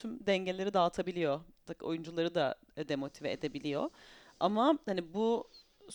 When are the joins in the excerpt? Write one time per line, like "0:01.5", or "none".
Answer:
none

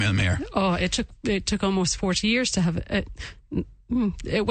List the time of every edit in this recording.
none

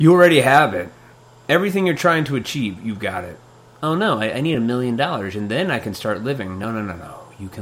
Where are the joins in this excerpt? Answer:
none

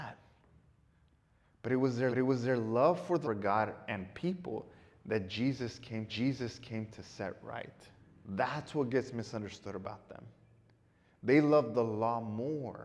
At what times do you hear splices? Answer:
0:02.1
0:03.2
0:06.1
0:08.0

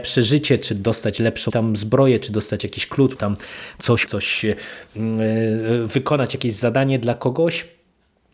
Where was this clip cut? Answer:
0:01.5
0:03.2
0:04.1

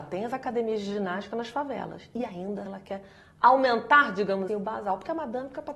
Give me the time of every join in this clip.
0:02.7
0:04.5

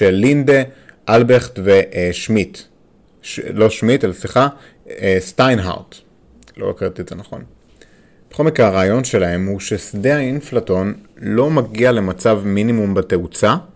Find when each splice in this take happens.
none

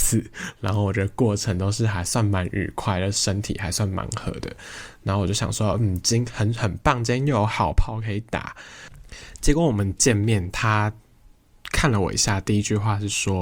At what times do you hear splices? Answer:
none

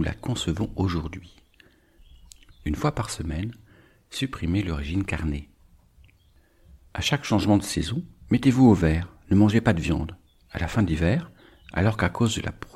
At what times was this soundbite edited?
none

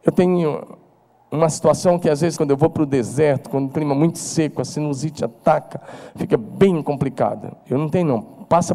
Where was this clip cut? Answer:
0:02.4
0:03.7

